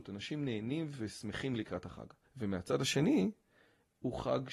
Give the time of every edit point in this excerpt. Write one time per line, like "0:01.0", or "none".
0:02.2